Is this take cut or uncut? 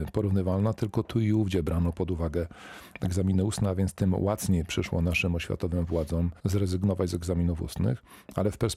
cut